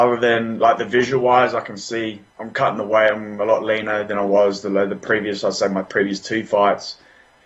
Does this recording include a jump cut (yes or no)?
yes